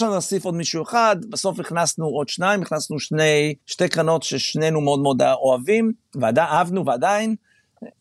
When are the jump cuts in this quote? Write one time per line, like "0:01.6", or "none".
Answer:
0:03.6